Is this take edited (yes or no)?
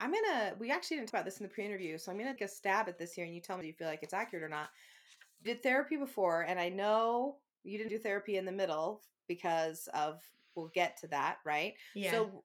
yes